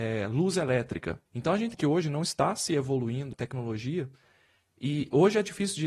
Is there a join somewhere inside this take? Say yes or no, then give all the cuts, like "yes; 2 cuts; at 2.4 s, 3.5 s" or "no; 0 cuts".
yes; 3 cuts; at 1.3 s, 1.7 s, 3.3 s